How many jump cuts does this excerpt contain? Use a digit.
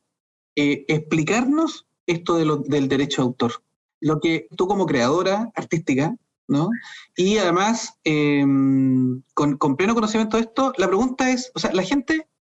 1